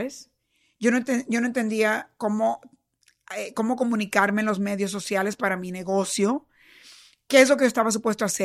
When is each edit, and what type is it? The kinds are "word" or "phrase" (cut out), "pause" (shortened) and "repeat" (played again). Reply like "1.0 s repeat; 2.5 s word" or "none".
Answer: none